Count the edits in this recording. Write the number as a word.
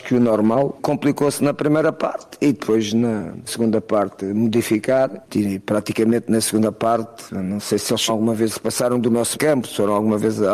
four